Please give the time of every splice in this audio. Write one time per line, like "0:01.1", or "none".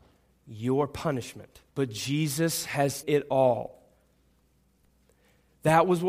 0:01.7
0:03.0